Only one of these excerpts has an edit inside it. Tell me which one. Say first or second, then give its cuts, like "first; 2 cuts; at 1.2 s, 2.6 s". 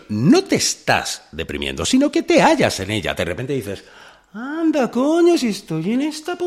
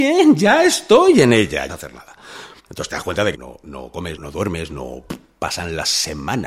second; 4 cuts; at 1.7 s, 2.6 s, 3.3 s, 4.2 s